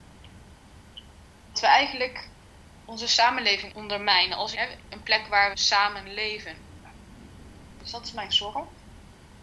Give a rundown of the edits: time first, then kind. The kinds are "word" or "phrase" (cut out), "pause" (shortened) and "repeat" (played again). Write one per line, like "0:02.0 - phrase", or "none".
0:01.5 - word
0:03.7 - word
0:04.5 - word
0:05.5 - word
0:08.3 - word